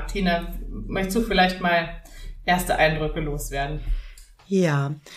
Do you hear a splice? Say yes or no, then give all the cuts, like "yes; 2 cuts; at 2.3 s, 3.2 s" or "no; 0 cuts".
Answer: no; 0 cuts